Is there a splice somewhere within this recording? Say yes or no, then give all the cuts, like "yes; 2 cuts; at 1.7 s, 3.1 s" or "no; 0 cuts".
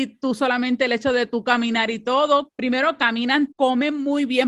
yes; 2 cuts; at 2.5 s, 3.5 s